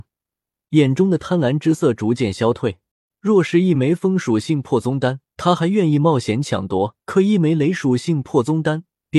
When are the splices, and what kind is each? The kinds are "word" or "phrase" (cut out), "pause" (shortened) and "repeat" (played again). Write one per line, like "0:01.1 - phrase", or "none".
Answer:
0:02.9 - pause
0:05.3 - pause
0:07.0 - pause